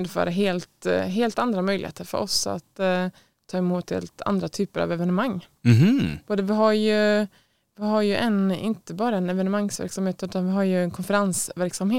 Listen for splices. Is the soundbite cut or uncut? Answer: uncut